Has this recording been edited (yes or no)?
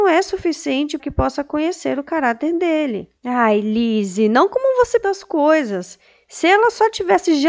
yes